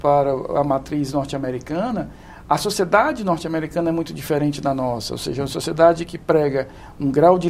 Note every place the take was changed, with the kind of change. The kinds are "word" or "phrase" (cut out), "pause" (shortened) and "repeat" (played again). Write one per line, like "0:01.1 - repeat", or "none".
none